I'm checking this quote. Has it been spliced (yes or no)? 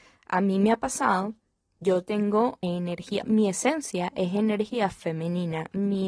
yes